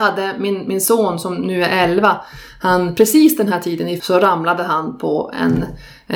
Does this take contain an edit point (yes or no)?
yes